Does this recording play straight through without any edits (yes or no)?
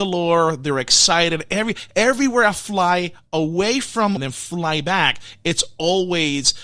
no